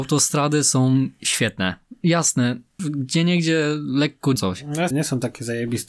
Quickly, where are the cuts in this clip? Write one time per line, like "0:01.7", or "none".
0:02.8
0:04.4
0:04.9